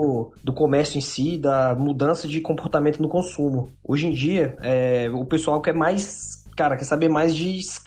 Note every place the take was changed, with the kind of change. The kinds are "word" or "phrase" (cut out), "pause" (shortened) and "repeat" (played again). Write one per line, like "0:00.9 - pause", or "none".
none